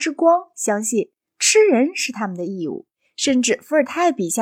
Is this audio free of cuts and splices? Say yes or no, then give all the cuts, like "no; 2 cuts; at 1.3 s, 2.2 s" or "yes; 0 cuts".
yes; 0 cuts